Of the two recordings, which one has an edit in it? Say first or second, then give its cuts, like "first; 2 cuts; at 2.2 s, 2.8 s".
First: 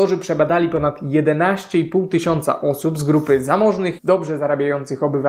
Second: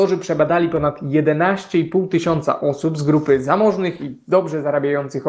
first; 1 cut; at 4.0 s